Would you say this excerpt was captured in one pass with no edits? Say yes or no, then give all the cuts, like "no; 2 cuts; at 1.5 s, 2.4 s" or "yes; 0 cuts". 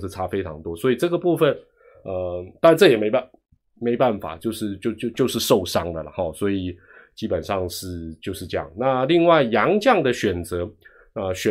yes; 0 cuts